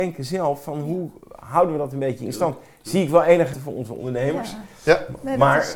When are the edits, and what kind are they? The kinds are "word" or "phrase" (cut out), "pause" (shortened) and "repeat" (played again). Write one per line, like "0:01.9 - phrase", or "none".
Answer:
0:03.5 - word